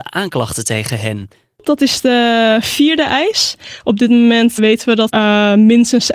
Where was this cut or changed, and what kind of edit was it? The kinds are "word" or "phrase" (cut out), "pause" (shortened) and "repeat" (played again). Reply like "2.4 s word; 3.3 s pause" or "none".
4.6 s word; 5.1 s word